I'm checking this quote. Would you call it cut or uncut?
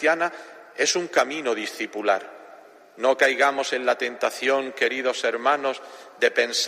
uncut